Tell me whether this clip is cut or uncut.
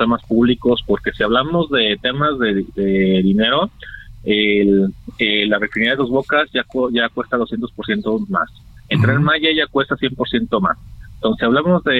uncut